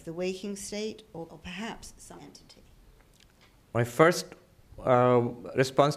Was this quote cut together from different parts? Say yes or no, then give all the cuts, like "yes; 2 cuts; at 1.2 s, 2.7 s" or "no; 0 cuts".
yes; 2 cuts; at 1.3 s, 2.2 s